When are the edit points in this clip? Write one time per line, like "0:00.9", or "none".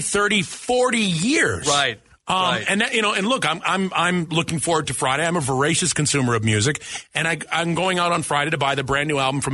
none